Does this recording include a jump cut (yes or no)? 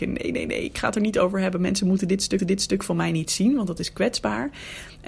yes